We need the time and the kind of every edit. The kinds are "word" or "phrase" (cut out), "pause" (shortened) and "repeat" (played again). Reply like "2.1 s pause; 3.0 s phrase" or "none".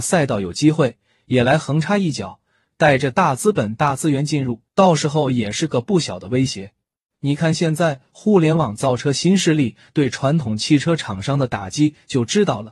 4.7 s pause; 7.1 s pause